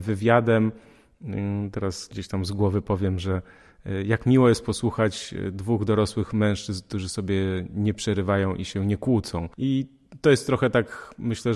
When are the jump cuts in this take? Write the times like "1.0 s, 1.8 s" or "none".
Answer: 9.5 s